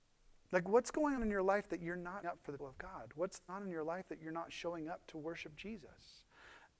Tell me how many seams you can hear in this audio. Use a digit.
4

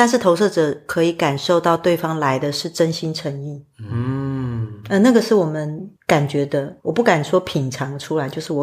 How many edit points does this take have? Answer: 2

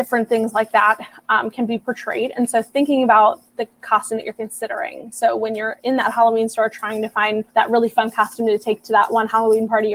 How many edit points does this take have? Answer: 1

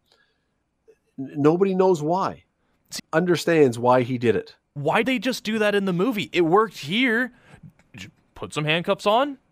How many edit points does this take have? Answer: 2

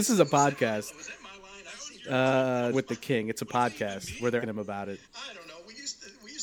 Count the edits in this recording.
3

